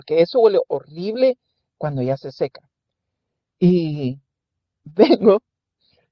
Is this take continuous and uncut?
yes; 0 cuts

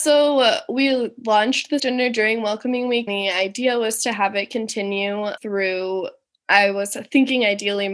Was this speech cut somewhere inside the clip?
yes; 3 cuts; at 1.8 s, 3.1 s, 5.4 s

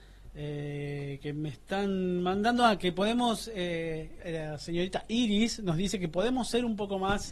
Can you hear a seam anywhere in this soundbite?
yes; 1 cut; at 4.2 s

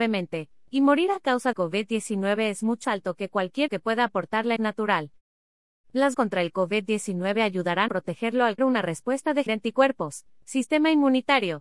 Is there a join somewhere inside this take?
yes; 8 cuts; at 1.5 s, 2.8 s, 3.7 s, 4.6 s, 6.1 s, 7.9 s, 8.6 s, 9.5 s

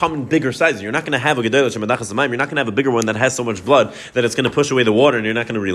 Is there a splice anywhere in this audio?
no; 0 cuts

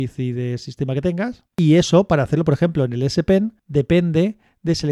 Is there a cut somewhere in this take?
yes; 2 cuts; at 1.5 s, 3.6 s

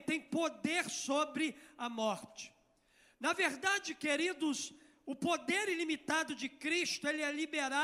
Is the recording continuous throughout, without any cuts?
yes; 0 cuts

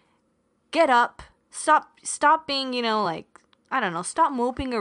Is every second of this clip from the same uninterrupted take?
yes; 0 cuts

